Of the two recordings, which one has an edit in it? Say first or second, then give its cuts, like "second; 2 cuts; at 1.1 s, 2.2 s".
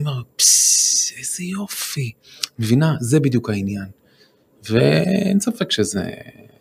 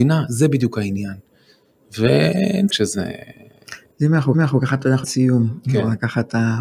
second; 3 cuts; at 2.7 s, 4.3 s, 5.0 s